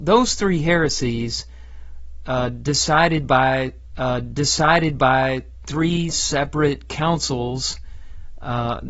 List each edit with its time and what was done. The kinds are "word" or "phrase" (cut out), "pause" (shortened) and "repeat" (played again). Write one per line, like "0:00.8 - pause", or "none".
0:03.9 - repeat

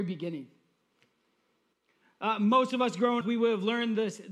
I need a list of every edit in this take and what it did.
0:03.2 - word

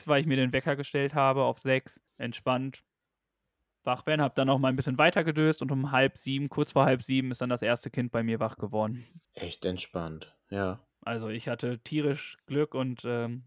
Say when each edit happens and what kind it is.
0:02.1 - pause
0:09.2 - pause

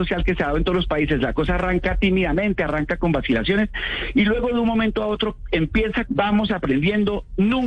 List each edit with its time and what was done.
0:06.0 - word

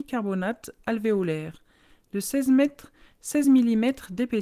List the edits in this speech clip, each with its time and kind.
none

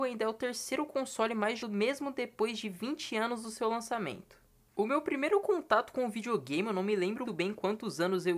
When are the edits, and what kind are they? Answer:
0:01.6 - word
0:07.3 - word

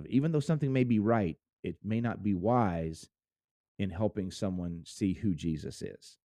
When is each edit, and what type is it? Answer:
none

